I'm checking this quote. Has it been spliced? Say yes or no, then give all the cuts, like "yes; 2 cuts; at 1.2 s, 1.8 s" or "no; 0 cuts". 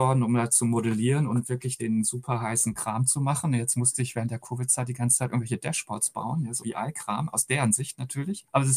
yes; 2 cuts; at 1.8 s, 6.6 s